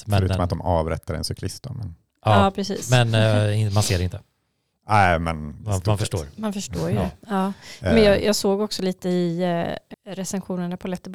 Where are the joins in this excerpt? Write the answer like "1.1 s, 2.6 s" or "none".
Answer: 9.9 s